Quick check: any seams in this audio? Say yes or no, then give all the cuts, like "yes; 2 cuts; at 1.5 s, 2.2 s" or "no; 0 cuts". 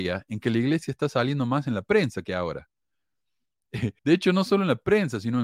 yes; 1 cut; at 4.0 s